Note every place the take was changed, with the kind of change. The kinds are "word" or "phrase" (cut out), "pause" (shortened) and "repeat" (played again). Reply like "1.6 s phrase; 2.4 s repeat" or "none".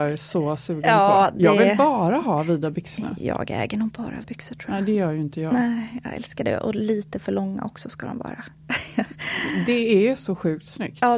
3.0 s word; 4.2 s word

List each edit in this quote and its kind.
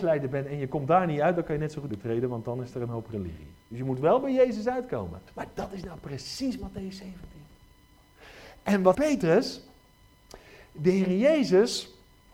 1.9 s phrase; 3.6 s pause; 5.3 s pause; 8.9 s word

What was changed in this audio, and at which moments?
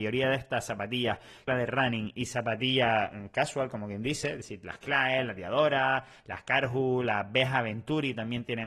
1.5 s phrase

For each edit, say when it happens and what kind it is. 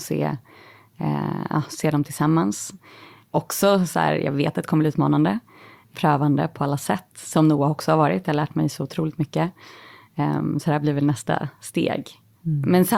none

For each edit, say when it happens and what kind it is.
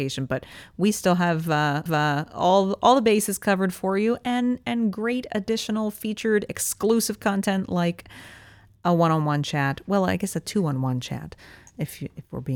1.9 s repeat

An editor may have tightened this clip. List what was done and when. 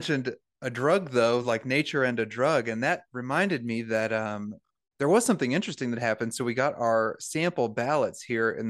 none

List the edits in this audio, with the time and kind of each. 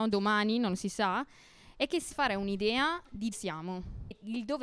2.1 s word; 3.3 s word

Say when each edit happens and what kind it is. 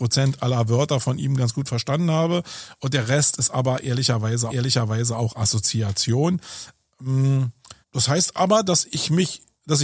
4.5 s repeat; 7.8 s pause

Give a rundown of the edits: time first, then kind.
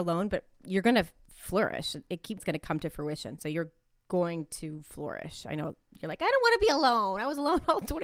2.4 s word

